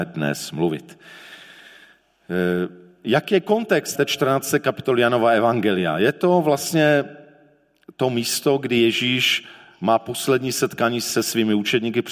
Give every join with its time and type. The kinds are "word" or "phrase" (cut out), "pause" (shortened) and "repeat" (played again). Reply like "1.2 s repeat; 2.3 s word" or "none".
3.9 s word